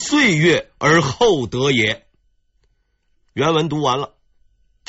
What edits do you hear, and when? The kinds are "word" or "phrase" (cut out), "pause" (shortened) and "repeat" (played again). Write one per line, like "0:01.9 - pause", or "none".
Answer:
0:02.2 - pause